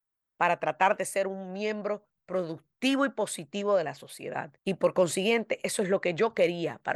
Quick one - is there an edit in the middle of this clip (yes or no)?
yes